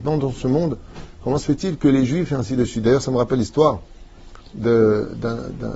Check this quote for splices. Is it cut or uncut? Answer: uncut